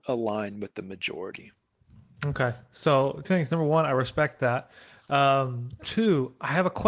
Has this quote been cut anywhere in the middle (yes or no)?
yes